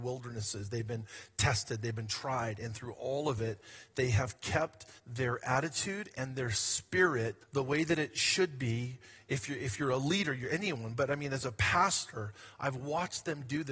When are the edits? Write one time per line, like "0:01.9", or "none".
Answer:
0:05.0
0:07.4